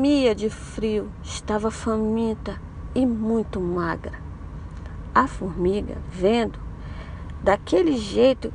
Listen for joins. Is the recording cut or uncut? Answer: uncut